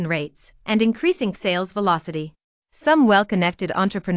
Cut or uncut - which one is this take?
cut